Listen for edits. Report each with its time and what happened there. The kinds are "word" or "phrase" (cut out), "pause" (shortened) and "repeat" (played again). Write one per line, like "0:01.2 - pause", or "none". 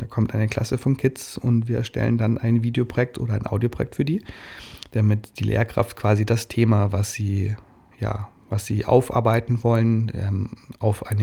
none